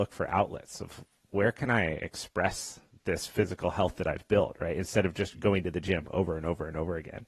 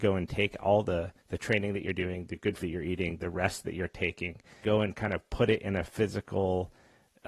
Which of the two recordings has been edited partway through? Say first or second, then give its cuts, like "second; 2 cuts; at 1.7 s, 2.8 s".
second; 3 cuts; at 1.2 s, 2.6 s, 4.6 s